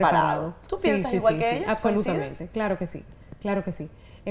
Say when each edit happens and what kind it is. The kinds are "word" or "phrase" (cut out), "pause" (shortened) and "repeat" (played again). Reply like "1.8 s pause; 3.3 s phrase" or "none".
none